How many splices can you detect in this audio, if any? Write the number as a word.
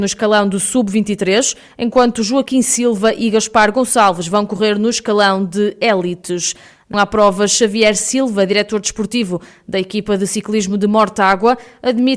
one